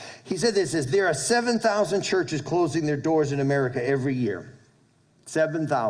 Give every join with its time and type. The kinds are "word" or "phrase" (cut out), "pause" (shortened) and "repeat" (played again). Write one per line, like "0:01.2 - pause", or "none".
none